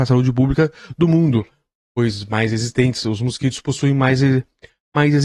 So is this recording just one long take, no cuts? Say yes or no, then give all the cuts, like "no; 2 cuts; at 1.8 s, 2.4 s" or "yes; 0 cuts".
yes; 0 cuts